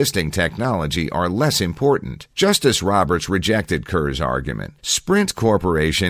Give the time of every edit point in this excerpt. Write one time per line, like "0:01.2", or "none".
0:02.3
0:04.8